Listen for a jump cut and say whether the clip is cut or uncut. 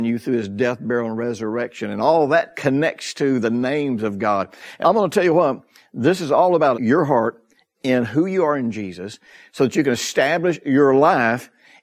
cut